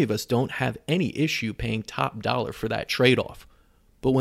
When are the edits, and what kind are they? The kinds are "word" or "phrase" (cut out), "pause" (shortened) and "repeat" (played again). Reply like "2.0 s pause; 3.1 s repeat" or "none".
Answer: none